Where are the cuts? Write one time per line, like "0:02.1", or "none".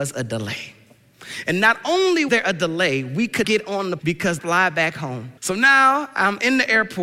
0:02.3
0:03.4
0:04.0
0:04.4
0:05.4